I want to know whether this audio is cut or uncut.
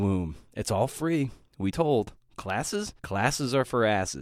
cut